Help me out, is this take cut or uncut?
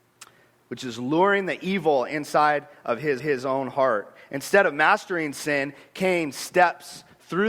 cut